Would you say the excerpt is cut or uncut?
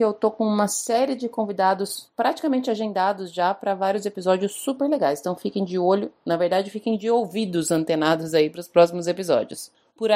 uncut